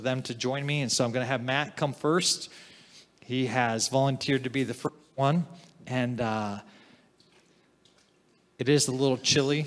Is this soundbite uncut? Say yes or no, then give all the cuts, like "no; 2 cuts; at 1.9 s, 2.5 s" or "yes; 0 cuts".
yes; 0 cuts